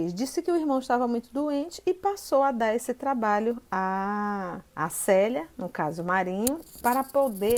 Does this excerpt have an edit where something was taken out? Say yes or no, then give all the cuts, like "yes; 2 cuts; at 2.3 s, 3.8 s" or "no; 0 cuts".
yes; 1 cut; at 4.7 s